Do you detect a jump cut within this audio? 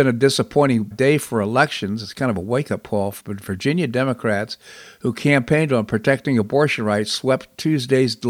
yes; 2 cuts; at 0.9 s, 3.2 s

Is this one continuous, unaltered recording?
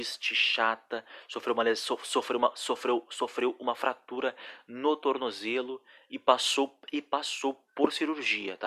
yes; 0 cuts

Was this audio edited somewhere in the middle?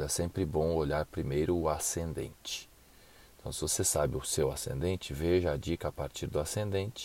no; 0 cuts

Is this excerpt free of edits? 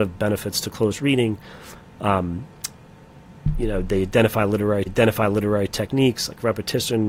no; 1 cut; at 4.9 s

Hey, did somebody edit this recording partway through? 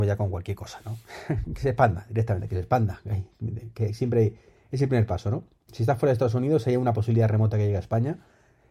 no; 0 cuts

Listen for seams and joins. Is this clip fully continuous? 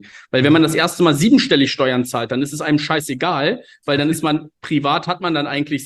yes; 0 cuts

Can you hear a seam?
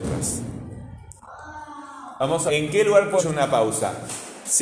yes; 2 cuts; at 2.5 s, 3.2 s

